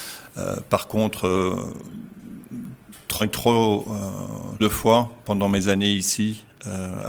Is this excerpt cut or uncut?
cut